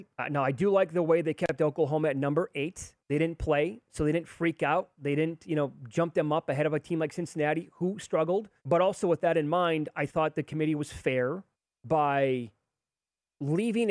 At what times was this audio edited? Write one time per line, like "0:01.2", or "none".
0:03.0
0:08.6
0:11.5